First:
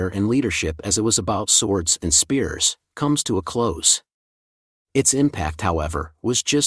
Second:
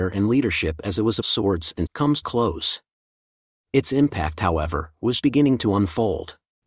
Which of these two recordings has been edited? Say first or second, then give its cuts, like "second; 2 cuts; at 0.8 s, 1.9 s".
second; 4 cuts; at 1.2 s, 1.9 s, 2.2 s, 5.2 s